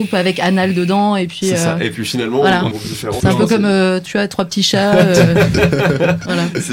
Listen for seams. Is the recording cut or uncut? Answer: cut